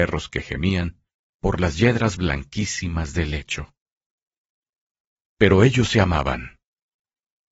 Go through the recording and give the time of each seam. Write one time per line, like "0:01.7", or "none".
none